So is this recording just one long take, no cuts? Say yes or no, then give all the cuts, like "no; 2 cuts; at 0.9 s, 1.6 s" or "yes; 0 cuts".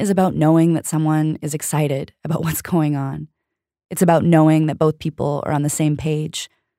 yes; 0 cuts